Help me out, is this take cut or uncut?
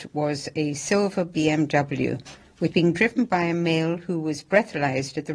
cut